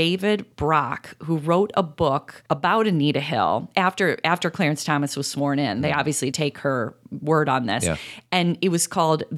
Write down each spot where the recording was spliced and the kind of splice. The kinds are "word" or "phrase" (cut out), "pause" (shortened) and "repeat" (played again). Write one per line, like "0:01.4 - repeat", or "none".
0:02.5 - pause
0:06.3 - word